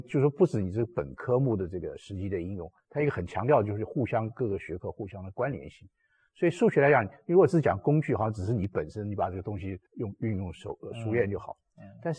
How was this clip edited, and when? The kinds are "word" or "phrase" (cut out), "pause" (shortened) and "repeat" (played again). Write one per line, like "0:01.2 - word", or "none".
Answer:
0:09.9 - pause